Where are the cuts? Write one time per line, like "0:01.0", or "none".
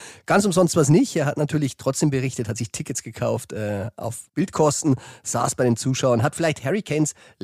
0:04.3